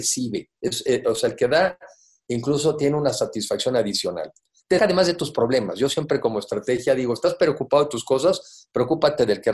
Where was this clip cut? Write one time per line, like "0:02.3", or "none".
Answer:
0:04.8